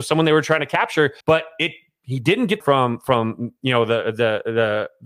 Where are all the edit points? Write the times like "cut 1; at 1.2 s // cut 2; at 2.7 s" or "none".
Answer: cut 1; at 1.2 s // cut 2; at 2.6 s